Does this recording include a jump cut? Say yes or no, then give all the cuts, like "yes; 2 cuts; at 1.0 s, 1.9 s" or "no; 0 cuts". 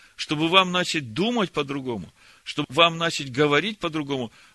no; 0 cuts